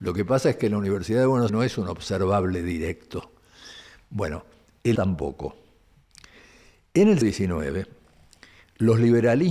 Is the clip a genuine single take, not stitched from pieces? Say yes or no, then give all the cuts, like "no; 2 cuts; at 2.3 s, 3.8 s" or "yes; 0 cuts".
no; 3 cuts; at 1.5 s, 5.0 s, 7.2 s